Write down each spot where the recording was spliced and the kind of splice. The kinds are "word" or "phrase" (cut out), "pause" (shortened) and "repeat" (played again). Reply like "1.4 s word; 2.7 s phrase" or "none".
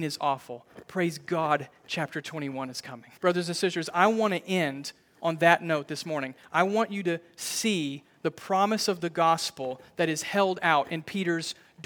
3.2 s pause